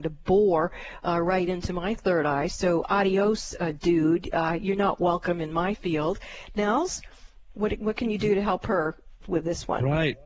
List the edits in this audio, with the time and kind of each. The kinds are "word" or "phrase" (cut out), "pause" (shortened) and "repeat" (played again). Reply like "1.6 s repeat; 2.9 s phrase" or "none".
none